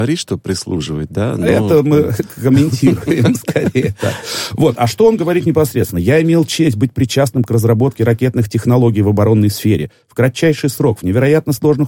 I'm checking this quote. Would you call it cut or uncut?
uncut